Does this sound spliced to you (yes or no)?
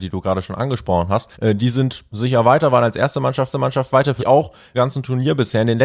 yes